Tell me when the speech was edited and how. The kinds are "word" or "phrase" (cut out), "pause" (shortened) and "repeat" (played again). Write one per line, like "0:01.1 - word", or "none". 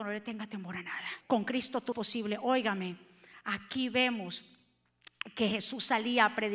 0:01.2 - pause
0:01.9 - word